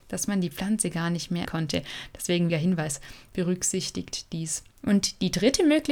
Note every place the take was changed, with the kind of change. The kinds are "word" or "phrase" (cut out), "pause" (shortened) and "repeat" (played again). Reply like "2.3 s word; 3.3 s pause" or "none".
1.4 s word; 2.5 s word; 4.7 s pause